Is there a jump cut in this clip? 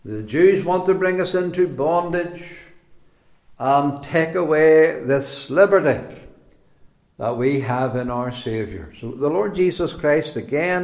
no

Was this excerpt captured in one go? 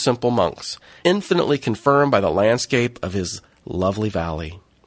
no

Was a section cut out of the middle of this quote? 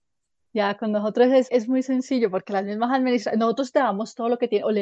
yes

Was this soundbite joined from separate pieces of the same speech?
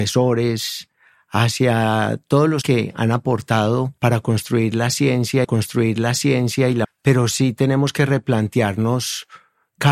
yes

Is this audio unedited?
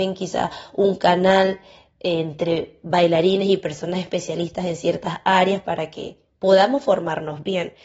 yes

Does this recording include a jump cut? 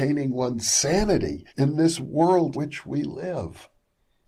yes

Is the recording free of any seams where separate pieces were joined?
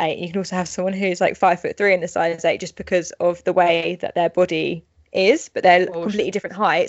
yes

